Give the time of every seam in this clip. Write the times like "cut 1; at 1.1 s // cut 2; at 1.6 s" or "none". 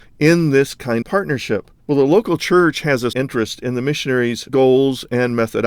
cut 1; at 1.0 s // cut 2; at 1.8 s // cut 3; at 3.1 s // cut 4; at 4.5 s